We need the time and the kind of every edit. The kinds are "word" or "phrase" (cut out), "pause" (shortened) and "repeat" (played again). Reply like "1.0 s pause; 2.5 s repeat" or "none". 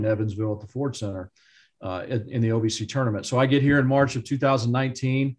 none